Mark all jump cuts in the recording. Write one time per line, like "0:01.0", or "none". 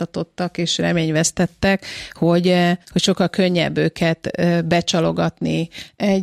0:02.8